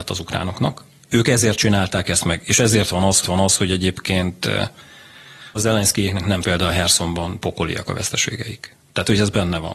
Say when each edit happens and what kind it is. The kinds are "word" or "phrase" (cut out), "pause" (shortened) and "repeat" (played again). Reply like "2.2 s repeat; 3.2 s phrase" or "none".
3.2 s repeat; 5.6 s word; 6.4 s phrase